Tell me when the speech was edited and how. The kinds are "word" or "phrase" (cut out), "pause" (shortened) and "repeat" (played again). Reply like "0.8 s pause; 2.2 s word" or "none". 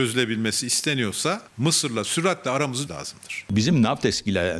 1.5 s pause; 2.9 s word